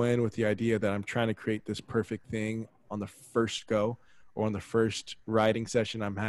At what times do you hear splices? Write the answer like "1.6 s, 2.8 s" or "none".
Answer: none